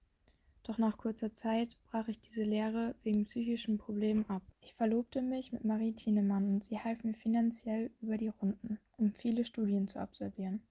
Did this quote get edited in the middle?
yes; 1 cut; at 4.5 s

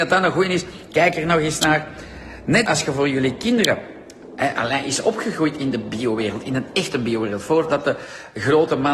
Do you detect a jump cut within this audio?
yes; 1 cut; at 2.7 s

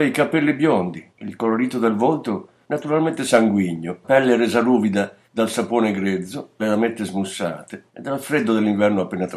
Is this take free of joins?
no; 5 cuts; at 1.1 s, 4.0 s, 5.2 s, 6.6 s, 7.9 s

